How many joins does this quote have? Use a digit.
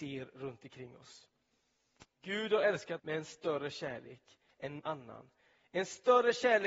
2